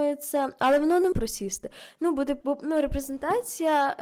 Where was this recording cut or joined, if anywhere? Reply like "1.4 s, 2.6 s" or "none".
1.1 s, 2.4 s